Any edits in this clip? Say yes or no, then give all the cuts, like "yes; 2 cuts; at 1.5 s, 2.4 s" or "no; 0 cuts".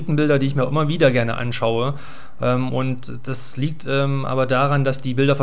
no; 0 cuts